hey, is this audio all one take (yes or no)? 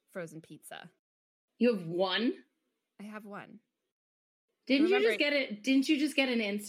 yes